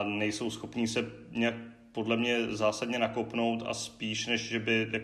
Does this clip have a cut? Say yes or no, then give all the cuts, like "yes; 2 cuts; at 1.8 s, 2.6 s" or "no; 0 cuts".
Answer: no; 0 cuts